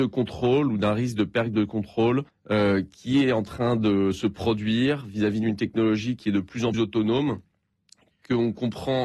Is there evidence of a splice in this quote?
yes; 2 cuts; at 2.3 s, 6.7 s

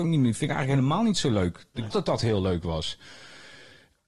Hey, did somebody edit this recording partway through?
yes; 1 cut; at 1.9 s

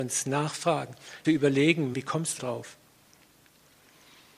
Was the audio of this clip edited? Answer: yes; 3 cuts; at 1.2 s, 1.9 s, 2.4 s

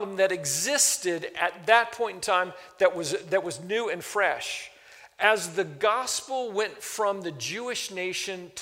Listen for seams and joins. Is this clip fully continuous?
yes; 0 cuts

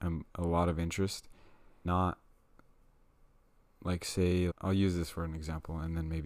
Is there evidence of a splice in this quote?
yes; 2 cuts; at 1.8 s, 4.5 s

